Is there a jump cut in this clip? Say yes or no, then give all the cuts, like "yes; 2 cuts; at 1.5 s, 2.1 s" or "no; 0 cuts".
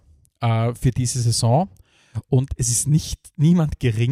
no; 0 cuts